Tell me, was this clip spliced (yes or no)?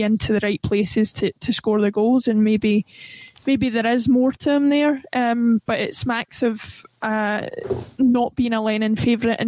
no